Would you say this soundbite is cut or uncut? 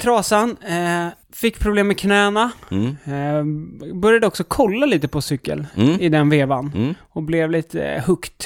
cut